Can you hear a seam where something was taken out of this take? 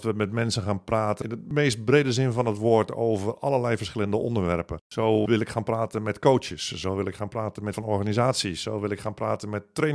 yes; 1 cut; at 7.7 s

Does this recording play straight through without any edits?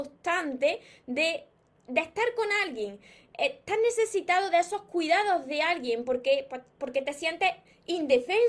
yes; 0 cuts

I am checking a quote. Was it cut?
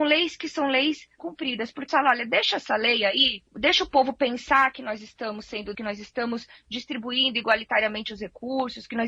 yes; 4 cuts; at 1.2 s, 1.9 s, 3.5 s, 5.7 s

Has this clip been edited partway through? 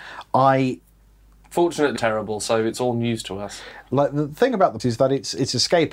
yes; 2 cuts; at 2.0 s, 4.8 s

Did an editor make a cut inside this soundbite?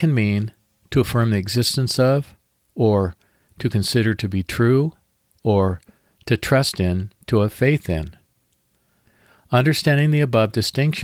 no; 0 cuts

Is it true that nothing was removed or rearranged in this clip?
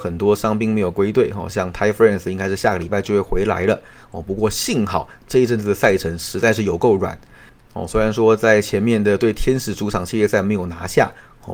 yes; 0 cuts

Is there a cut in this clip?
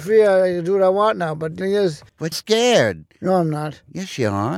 yes; 2 cuts; at 1.6 s, 2.3 s

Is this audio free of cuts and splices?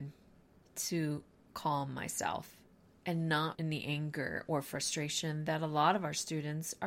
no; 1 cut; at 3.5 s

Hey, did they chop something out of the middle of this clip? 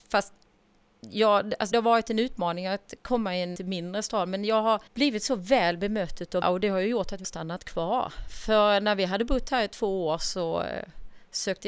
yes; 5 cuts; at 1.7 s, 3.6 s, 4.9 s, 6.4 s, 7.2 s

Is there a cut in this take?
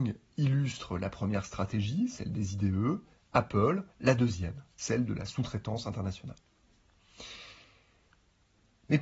yes; 1 cut; at 3.9 s

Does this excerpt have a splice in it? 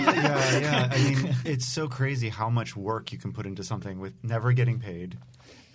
yes; 1 cut; at 1.5 s

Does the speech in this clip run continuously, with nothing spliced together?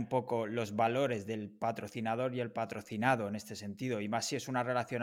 yes; 0 cuts

